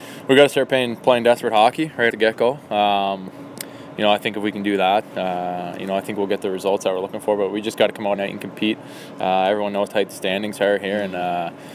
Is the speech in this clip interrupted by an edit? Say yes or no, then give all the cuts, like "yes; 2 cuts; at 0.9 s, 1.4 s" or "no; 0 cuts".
yes; 4 cuts; at 2.1 s, 5.0 s, 8.2 s, 9.9 s